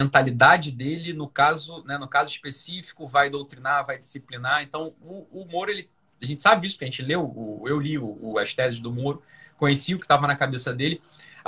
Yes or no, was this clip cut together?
no